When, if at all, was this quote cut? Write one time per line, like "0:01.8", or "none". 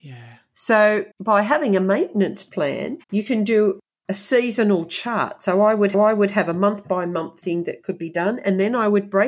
0:01.1
0:03.0
0:05.9